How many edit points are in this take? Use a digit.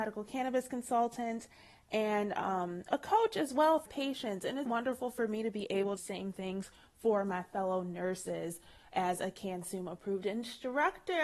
3